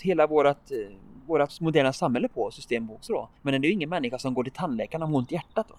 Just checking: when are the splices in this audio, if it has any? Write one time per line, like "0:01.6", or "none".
0:03.4